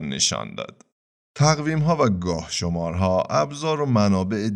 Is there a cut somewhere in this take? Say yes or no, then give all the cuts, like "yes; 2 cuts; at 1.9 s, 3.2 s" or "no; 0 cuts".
yes; 1 cut; at 1.2 s